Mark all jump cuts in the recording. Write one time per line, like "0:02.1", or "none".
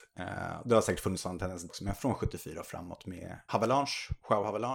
0:01.7
0:03.5